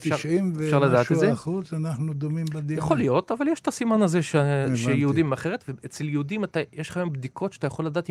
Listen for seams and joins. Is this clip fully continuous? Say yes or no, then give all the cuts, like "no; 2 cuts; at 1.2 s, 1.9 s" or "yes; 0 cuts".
yes; 0 cuts